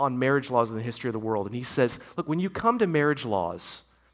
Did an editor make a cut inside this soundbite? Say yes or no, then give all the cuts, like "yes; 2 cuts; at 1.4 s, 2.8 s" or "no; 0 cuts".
no; 0 cuts